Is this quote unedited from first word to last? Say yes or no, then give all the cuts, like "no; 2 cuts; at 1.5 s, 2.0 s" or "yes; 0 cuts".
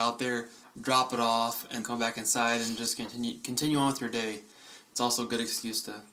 no; 1 cut; at 1.8 s